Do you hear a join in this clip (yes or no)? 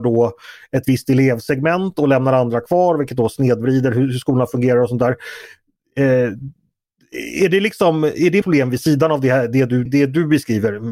yes